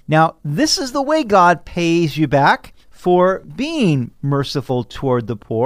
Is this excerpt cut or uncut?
cut